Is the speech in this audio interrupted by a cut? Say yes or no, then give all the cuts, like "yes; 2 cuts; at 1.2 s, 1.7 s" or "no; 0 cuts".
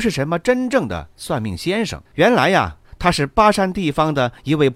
yes; 1 cut; at 2.1 s